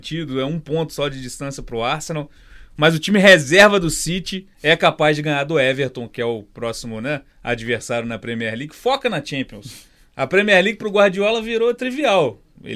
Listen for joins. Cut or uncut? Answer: cut